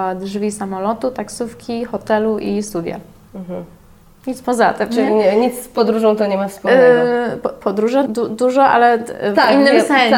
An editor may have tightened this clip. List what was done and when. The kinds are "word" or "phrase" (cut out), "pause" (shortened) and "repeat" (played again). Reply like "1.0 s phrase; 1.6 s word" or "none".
8.1 s word